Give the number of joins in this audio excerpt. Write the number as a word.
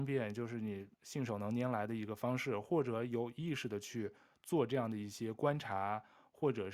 one